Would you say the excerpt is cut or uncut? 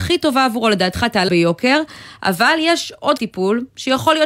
cut